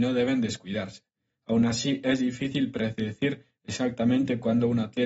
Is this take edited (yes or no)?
no